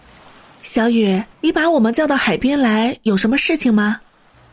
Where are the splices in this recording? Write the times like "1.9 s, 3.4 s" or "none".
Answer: 1.3 s